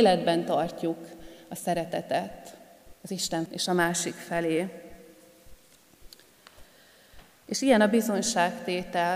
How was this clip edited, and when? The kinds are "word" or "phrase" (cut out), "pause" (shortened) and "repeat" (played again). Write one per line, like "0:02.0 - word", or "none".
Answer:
0:02.9 - pause
0:03.5 - word